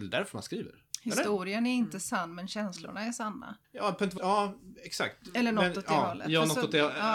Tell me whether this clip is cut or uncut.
cut